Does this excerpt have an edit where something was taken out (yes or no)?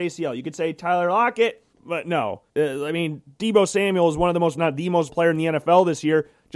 yes